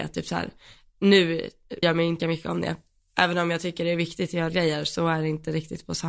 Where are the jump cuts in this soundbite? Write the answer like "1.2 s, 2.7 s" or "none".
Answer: 1.8 s, 2.2 s, 4.5 s